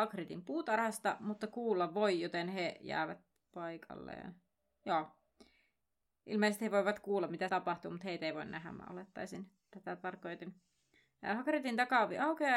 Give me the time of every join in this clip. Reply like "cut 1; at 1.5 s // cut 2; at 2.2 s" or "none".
cut 1; at 7.5 s